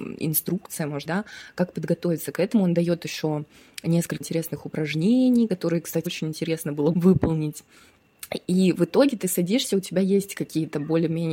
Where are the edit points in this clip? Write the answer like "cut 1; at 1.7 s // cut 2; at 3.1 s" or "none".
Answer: cut 1; at 1.1 s // cut 2; at 4.2 s // cut 3; at 6.1 s // cut 4; at 6.9 s